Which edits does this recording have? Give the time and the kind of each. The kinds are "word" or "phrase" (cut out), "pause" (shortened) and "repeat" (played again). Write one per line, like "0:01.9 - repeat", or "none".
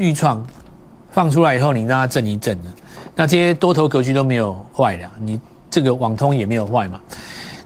none